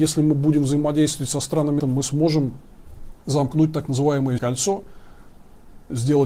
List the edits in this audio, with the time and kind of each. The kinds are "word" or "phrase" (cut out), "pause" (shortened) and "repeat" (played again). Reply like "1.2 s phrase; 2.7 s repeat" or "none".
1.8 s word; 3.2 s pause; 4.4 s word